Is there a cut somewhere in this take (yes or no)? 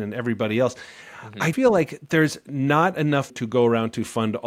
yes